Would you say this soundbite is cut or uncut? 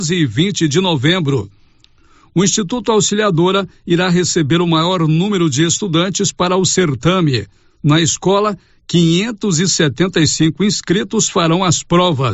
uncut